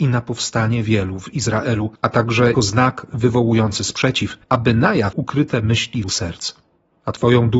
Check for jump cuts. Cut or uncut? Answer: cut